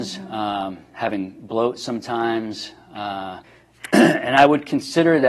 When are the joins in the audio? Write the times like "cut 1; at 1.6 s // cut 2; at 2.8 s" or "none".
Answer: cut 1; at 3.4 s